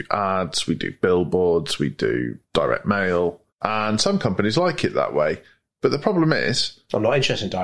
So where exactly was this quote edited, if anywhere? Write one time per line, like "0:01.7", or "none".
0:02.4
0:03.5